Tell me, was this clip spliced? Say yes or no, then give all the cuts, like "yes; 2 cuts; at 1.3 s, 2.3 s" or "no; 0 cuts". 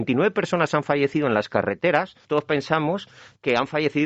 yes; 1 cut; at 2.2 s